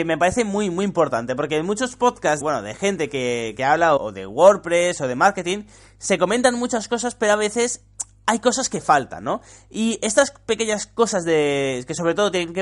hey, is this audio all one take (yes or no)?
no